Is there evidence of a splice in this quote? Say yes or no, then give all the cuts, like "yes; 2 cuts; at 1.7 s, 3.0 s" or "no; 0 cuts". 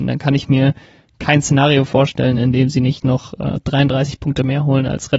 no; 0 cuts